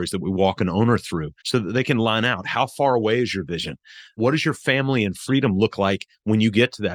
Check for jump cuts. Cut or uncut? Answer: cut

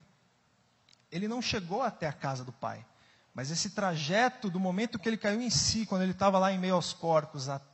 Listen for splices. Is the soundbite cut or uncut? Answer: uncut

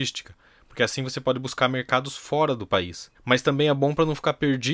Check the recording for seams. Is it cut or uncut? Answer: cut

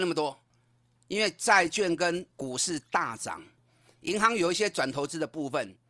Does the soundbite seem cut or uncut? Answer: cut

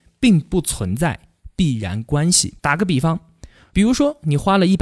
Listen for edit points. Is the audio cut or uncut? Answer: cut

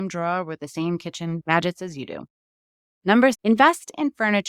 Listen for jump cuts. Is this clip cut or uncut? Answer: cut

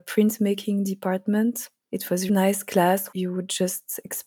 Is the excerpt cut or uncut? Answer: cut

